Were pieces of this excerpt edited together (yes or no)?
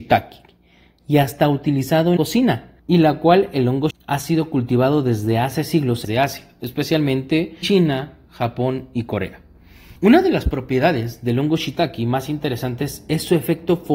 yes